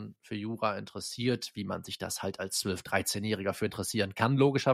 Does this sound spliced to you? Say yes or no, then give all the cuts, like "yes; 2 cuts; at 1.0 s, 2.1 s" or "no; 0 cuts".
no; 0 cuts